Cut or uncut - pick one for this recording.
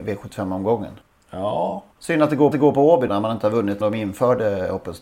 cut